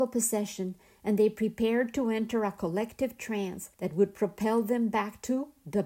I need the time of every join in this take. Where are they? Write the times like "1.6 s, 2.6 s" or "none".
3.7 s